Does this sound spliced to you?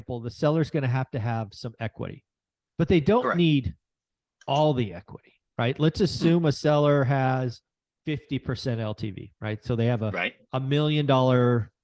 no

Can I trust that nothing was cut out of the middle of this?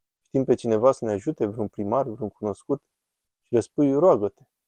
yes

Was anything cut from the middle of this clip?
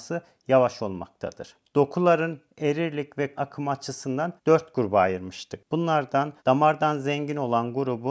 yes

